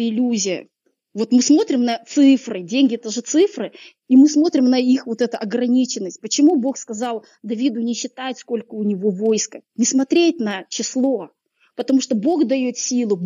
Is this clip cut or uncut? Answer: uncut